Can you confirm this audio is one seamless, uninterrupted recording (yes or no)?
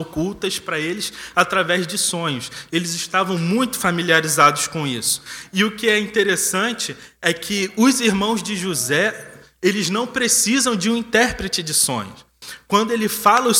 yes